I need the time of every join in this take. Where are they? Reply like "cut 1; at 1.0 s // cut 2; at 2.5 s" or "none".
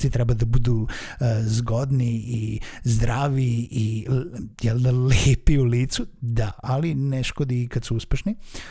none